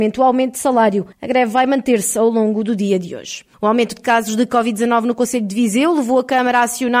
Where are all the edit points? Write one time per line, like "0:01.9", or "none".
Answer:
0:01.1
0:03.5